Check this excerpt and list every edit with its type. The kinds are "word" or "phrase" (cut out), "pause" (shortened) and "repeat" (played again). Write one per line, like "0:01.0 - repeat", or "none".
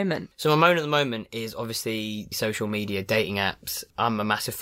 0:02.3 - word